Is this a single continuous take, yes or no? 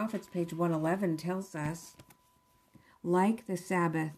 yes